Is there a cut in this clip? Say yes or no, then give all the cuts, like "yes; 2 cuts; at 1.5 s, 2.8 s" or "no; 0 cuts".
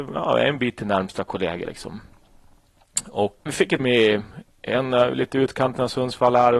yes; 3 cuts; at 1.6 s, 3.5 s, 3.8 s